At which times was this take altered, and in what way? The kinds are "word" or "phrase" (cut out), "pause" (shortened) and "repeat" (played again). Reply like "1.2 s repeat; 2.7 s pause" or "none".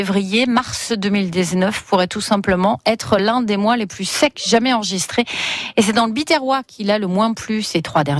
none